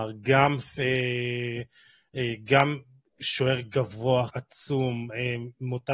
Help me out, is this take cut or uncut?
cut